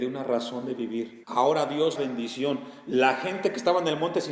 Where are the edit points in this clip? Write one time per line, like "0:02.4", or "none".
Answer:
0:01.2
0:02.0